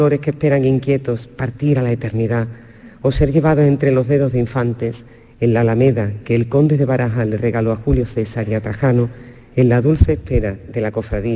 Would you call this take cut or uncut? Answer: uncut